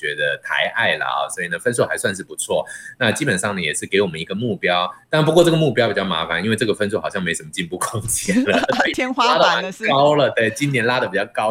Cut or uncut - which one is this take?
uncut